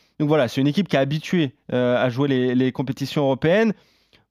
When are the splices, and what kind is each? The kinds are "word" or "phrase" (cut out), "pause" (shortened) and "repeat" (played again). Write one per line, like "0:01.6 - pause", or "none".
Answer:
none